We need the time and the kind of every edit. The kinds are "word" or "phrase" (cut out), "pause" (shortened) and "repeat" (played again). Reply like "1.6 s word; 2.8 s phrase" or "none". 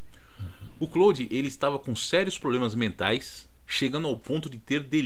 none